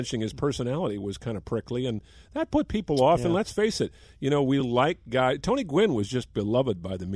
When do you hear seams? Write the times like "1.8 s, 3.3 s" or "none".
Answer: none